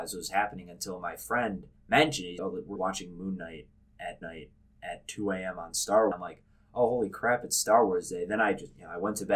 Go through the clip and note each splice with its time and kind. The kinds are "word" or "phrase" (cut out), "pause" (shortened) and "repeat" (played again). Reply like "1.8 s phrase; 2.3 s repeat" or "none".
1.8 s pause; 2.4 s word; 2.8 s word; 4.2 s repeat; 6.1 s phrase